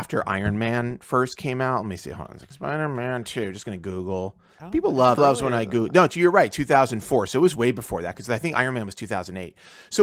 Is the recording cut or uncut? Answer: cut